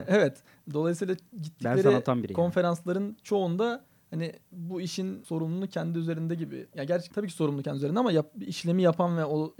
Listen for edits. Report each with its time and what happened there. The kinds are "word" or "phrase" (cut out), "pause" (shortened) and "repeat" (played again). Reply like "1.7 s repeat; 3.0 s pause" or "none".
none